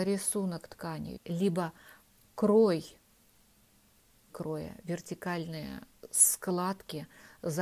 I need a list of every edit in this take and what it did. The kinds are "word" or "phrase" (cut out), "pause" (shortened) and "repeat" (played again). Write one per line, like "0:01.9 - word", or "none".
0:01.2 - word
0:04.3 - word